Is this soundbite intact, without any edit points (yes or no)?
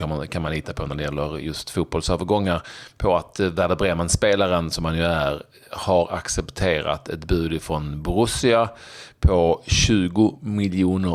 yes